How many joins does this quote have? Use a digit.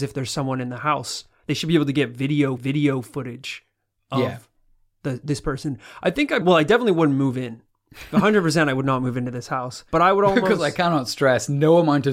3